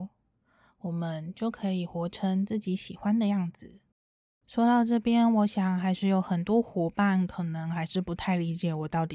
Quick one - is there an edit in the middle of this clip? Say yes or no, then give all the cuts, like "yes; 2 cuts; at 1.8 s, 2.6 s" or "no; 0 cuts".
no; 0 cuts